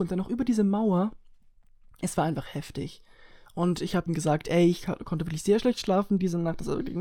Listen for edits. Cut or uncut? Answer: cut